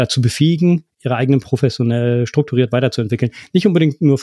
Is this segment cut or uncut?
cut